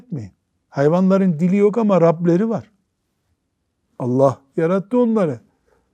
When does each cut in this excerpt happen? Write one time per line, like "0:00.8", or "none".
none